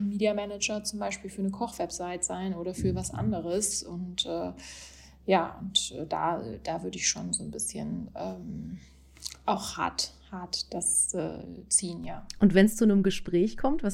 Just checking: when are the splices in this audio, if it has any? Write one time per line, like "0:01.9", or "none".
none